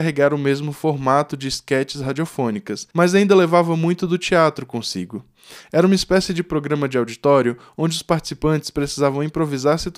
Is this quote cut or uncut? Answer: cut